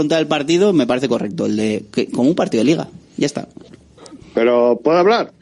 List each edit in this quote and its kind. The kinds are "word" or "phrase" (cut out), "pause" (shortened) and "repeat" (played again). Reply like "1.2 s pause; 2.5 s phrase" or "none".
none